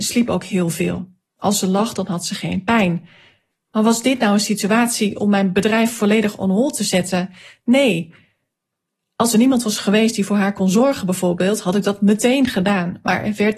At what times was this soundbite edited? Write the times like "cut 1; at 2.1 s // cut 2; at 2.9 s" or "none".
none